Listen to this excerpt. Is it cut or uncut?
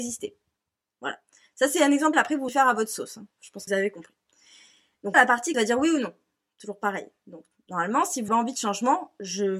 cut